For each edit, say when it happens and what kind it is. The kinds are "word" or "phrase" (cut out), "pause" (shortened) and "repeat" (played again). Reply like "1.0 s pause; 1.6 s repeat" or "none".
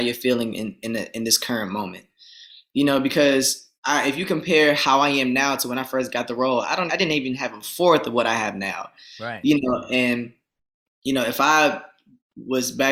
3.8 s pause; 6.9 s word

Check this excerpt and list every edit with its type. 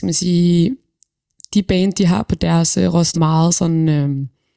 3.1 s word

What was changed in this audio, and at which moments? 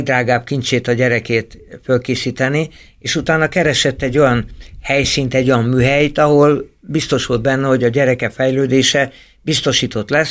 none

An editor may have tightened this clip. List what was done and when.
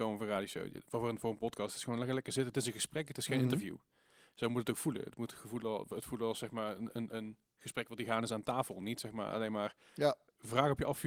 none

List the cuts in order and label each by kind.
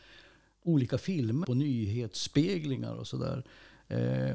1.4 s word

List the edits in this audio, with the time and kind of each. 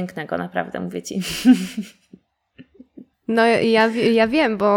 3.1 s pause

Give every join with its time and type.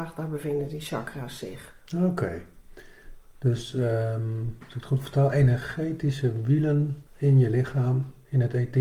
7.1 s pause

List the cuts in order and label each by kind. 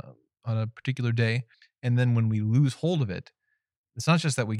1.5 s pause

